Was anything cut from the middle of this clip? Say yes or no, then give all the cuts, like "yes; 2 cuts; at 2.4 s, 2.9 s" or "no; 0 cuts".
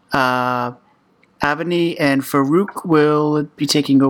no; 0 cuts